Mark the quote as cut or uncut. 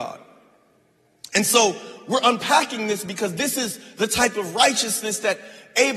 uncut